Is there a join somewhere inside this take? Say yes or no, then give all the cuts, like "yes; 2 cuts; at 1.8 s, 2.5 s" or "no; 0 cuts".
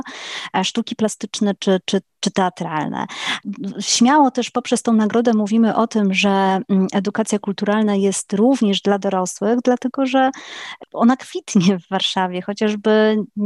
no; 0 cuts